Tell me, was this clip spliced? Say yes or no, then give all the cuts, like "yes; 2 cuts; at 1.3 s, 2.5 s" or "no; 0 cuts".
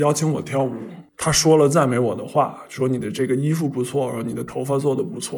yes; 1 cut; at 1.1 s